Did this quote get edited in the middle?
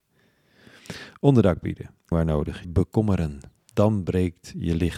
yes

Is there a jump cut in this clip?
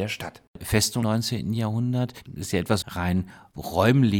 yes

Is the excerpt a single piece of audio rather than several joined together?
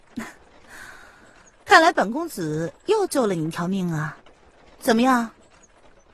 yes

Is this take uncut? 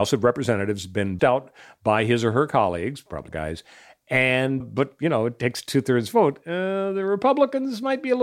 no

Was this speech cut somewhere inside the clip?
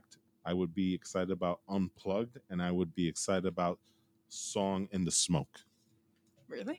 no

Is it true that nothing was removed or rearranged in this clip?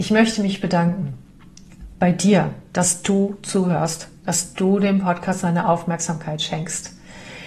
yes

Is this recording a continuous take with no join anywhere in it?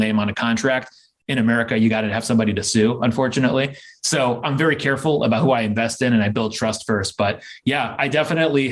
yes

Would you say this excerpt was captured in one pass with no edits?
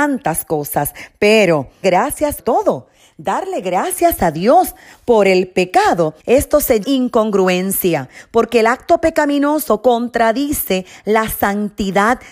no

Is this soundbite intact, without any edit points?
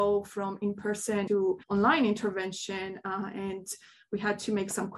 no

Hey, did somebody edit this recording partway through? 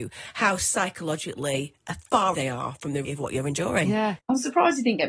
yes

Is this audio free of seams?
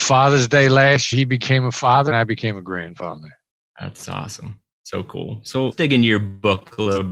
no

